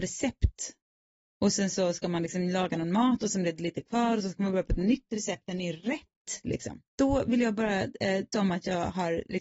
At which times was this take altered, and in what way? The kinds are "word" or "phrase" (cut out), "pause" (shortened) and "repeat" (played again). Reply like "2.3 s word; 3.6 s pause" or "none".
6.9 s pause; 8.3 s word